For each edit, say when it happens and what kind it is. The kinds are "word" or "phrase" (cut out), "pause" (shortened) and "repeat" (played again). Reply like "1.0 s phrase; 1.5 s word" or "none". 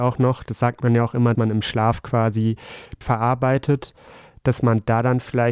1.3 s word; 3.0 s word